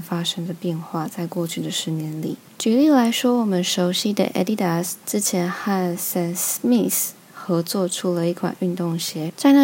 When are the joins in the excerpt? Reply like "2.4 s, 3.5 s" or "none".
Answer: none